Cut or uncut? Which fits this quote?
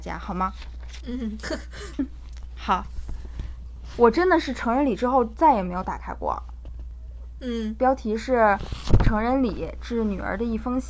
cut